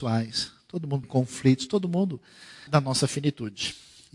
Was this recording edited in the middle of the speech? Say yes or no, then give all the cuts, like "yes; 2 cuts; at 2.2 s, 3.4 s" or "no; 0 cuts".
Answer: yes; 2 cuts; at 1.0 s, 2.7 s